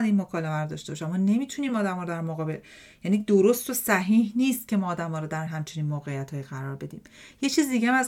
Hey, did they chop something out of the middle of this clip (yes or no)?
no